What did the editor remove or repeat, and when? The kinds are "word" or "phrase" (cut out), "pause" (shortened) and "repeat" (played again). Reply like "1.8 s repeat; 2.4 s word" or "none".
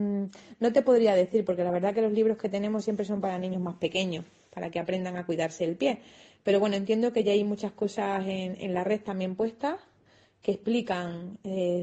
none